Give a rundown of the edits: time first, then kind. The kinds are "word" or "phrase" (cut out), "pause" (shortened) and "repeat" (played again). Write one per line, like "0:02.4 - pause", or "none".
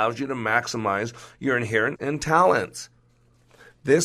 0:02.0 - word